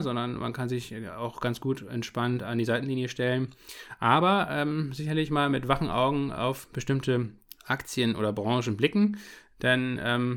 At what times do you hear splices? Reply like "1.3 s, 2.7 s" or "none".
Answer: 7.4 s